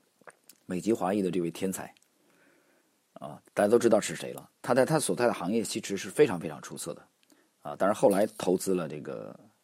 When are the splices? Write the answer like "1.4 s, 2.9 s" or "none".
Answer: 3.5 s, 4.6 s